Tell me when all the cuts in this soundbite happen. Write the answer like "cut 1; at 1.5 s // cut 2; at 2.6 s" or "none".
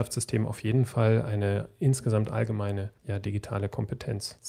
none